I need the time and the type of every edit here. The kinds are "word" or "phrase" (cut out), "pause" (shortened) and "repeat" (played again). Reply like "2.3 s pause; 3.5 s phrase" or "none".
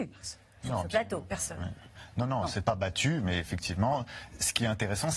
none